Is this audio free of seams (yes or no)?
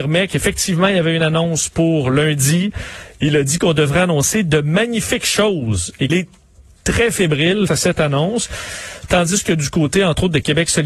no